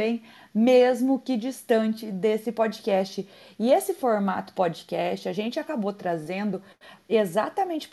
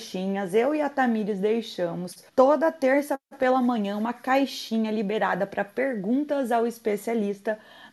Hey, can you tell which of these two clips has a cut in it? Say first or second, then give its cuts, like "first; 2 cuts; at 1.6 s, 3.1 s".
second; 1 cut; at 2.3 s